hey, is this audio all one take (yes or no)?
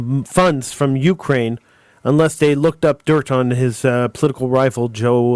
yes